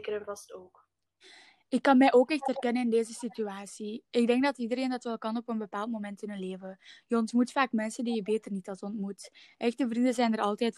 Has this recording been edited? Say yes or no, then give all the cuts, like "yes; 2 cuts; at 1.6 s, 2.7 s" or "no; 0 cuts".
no; 0 cuts